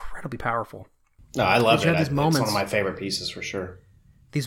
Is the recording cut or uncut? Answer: uncut